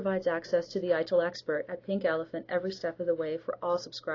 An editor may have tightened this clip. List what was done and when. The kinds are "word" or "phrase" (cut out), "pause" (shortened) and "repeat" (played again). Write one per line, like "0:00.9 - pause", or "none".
none